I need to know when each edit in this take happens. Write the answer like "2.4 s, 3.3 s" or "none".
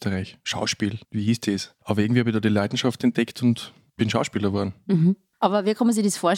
1.0 s